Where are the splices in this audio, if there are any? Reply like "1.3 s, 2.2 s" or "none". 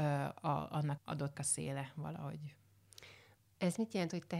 1.0 s, 1.3 s